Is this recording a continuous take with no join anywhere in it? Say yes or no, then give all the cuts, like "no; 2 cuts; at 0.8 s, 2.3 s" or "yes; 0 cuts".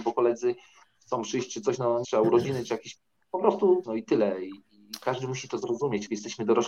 no; 2 cuts; at 2.0 s, 3.8 s